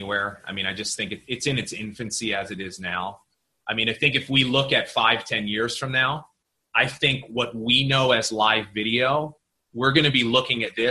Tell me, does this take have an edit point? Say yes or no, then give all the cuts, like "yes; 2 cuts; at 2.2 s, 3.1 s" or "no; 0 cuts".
no; 0 cuts